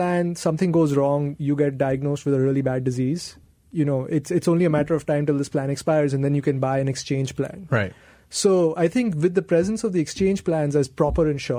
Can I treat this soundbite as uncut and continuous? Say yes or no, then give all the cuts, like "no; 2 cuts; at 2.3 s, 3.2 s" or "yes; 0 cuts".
yes; 0 cuts